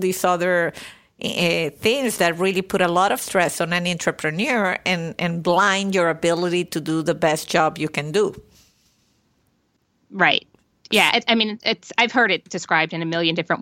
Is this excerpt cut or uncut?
uncut